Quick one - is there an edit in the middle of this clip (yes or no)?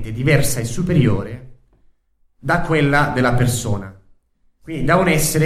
no